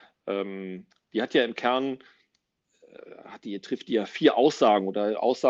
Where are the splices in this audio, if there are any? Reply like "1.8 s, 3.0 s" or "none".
none